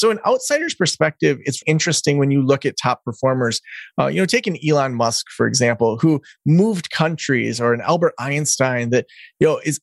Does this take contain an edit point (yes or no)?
yes